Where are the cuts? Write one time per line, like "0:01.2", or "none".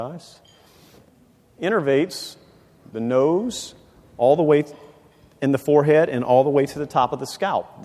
none

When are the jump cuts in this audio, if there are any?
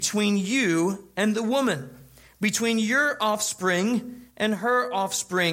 none

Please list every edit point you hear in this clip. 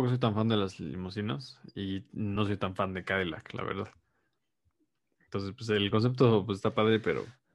none

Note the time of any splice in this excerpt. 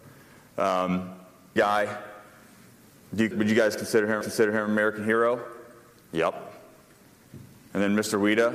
0:01.6
0:03.3
0:04.2

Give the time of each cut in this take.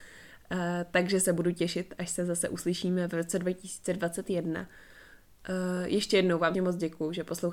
0:06.5

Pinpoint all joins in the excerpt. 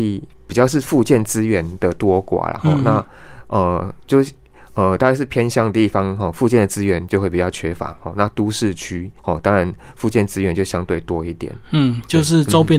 0:09.2
0:11.6

